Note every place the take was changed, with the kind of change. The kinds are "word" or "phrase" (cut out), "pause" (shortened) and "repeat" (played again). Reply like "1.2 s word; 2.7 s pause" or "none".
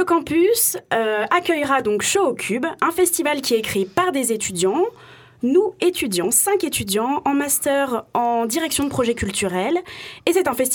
none

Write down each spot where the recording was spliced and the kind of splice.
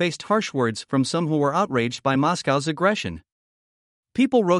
none

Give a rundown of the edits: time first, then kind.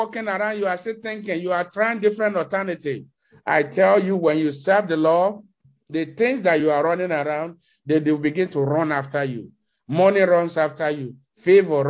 none

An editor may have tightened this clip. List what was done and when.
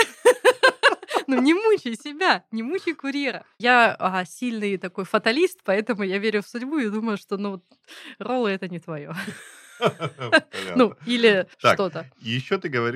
11.5 s pause

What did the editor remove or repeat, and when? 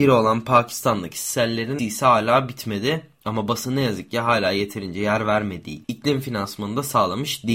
1.8 s word; 5.8 s word

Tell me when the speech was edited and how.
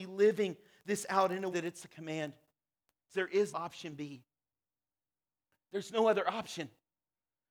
1.5 s word; 3.1 s word; 3.5 s word

